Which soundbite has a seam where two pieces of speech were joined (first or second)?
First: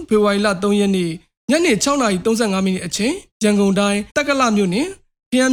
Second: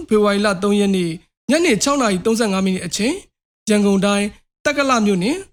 first